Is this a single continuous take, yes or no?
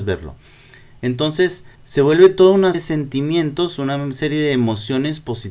no